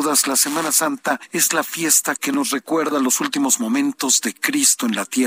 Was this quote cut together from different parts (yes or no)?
yes